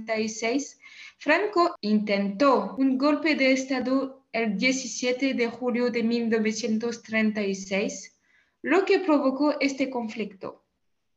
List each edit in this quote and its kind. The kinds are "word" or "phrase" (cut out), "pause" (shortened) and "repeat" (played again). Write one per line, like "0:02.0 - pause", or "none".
none